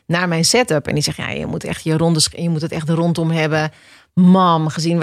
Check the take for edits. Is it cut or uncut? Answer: uncut